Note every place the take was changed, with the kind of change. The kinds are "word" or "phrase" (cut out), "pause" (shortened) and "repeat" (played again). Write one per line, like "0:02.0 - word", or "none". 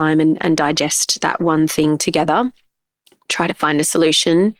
none